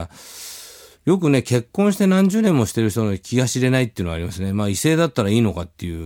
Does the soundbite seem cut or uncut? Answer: uncut